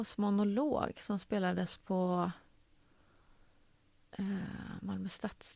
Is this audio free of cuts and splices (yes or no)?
yes